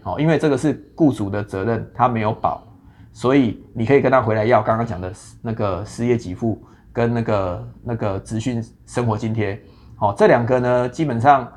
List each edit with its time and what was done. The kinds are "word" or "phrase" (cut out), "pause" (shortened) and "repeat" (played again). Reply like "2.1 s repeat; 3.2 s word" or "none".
none

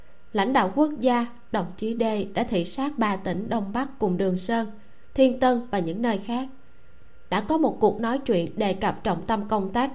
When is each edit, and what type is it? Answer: none

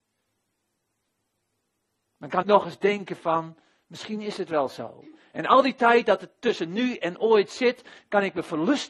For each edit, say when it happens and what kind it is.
2.4 s phrase

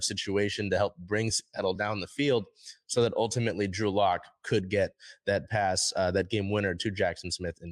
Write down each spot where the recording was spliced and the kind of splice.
none

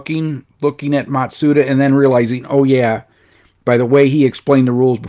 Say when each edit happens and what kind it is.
none

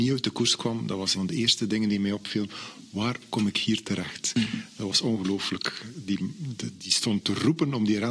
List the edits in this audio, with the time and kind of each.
1.1 s word

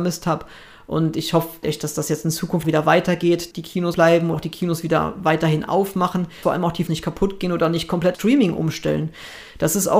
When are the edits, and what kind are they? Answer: 1.6 s word; 2.6 s word; 3.5 s word; 3.9 s word; 4.3 s word; 6.4 s word; 6.9 s word; 8.1 s word

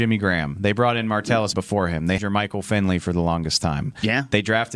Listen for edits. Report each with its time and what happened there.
1.5 s word; 2.2 s word

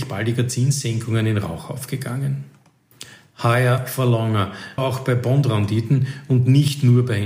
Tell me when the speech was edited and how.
4.8 s word

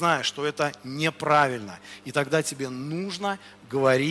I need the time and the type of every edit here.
none

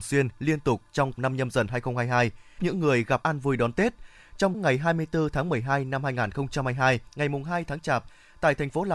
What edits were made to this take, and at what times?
1.1 s phrase; 2.6 s word; 3.2 s word; 4.5 s word; 7.1 s pause

